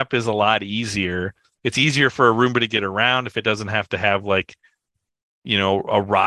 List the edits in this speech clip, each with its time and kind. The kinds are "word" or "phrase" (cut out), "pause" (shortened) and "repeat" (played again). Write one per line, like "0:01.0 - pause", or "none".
none

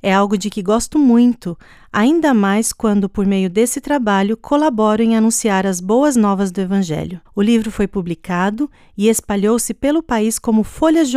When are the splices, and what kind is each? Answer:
0:07.3 - pause

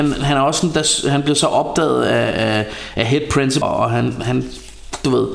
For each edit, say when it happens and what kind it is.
0:03.6 - word

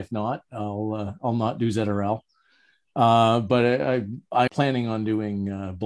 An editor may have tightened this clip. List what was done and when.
0:04.5 - word

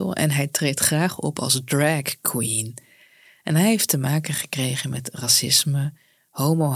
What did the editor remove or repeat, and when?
none

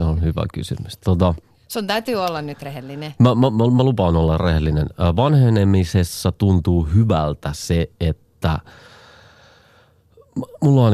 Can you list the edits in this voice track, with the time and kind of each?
none

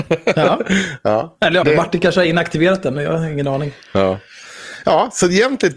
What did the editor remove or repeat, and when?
0:01.6 - phrase
0:03.8 - pause

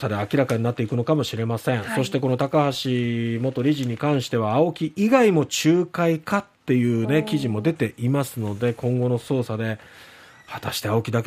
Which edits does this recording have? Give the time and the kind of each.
none

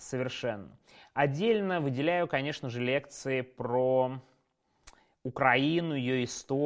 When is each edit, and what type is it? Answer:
none

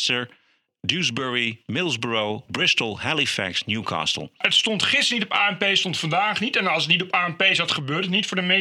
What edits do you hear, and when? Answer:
0:02.5 - word

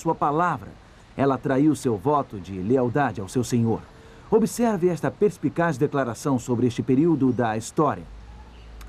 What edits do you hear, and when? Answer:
none

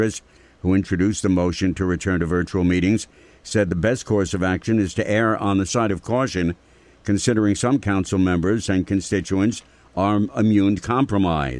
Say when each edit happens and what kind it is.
none

